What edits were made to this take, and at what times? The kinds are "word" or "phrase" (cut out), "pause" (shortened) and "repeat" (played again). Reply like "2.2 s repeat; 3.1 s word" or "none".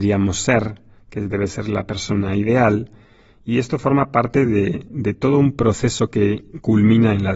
none